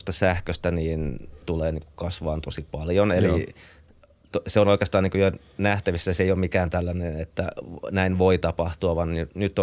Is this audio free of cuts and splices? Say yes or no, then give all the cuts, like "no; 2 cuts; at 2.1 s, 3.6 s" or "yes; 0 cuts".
no; 1 cut; at 1.4 s